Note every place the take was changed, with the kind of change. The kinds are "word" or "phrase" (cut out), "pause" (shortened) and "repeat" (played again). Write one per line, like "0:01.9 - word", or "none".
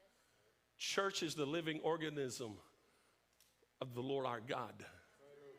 none